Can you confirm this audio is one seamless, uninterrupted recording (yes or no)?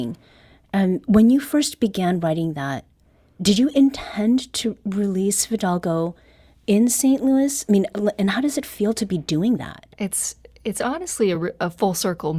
yes